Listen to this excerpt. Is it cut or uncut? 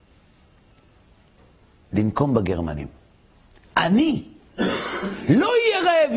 uncut